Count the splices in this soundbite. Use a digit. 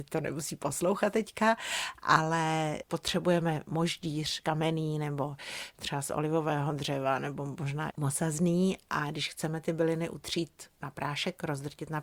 1